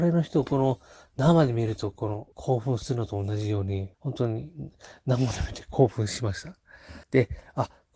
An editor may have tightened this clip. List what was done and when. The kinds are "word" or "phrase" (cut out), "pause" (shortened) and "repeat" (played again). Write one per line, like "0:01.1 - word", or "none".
0:02.3 - pause
0:03.9 - pause
0:07.0 - pause